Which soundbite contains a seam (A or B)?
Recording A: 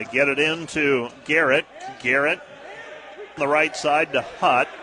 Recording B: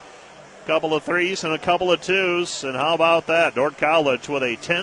A